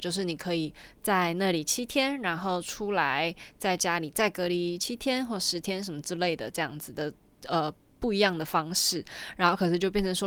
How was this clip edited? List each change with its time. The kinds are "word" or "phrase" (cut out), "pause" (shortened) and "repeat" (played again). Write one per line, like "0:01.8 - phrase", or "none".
none